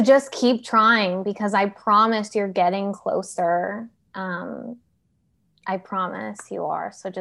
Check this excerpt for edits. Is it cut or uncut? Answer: uncut